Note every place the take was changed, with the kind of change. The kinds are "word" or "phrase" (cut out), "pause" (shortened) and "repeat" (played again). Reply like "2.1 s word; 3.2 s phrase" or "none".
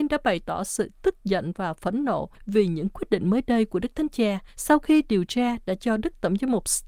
2.3 s pause; 4.5 s pause